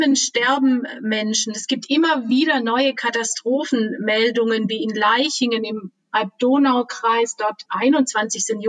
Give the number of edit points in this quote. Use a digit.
1